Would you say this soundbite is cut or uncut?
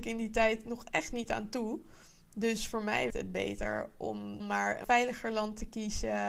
cut